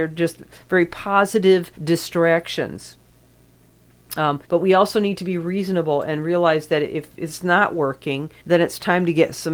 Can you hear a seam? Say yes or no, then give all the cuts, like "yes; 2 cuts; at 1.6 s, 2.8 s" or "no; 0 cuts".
yes; 3 cuts; at 1.7 s, 4.4 s, 8.4 s